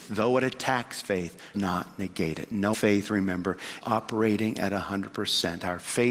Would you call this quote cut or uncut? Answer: cut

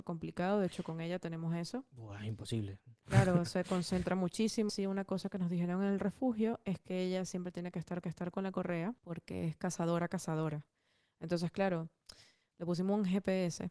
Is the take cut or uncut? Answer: cut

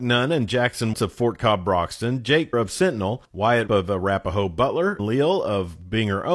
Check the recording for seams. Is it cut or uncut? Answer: cut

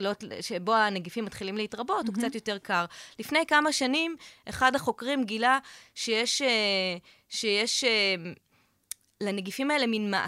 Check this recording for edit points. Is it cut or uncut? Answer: uncut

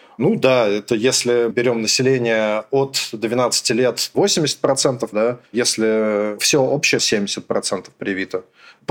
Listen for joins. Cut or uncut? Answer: cut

